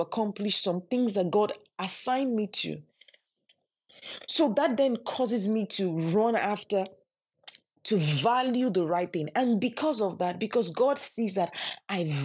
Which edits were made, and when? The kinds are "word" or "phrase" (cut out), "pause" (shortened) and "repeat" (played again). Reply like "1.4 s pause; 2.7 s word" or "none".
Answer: none